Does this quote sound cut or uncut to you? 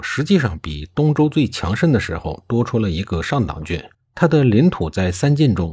cut